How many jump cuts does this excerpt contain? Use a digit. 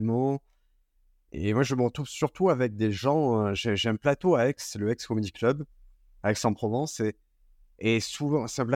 0